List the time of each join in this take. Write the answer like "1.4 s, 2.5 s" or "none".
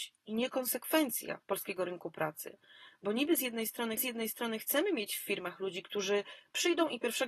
4.0 s